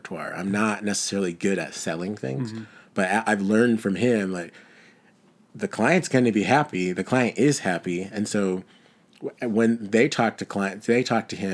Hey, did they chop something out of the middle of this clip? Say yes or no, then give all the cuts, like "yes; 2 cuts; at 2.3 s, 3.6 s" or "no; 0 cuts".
no; 0 cuts